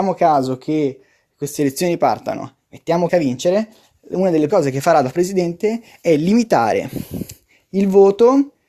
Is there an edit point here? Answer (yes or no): yes